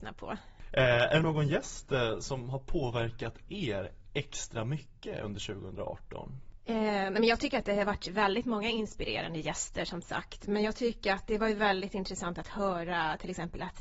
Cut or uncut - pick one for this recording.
uncut